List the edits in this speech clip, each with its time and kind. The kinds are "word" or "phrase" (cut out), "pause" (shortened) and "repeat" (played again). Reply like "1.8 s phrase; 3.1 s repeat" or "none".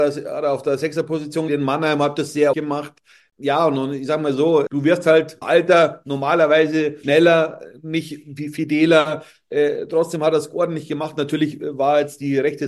1.5 s word; 2.5 s word; 4.7 s word; 5.4 s word; 7.0 s word